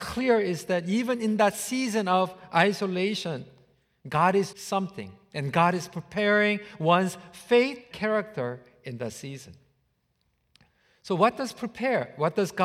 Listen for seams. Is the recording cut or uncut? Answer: cut